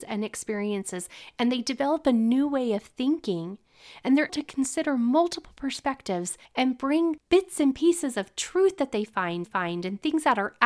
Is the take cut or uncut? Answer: cut